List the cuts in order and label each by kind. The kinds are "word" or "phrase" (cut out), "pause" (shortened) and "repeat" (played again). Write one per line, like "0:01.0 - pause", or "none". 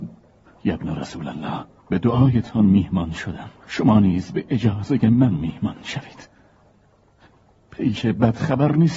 0:01.8 - pause
0:03.6 - pause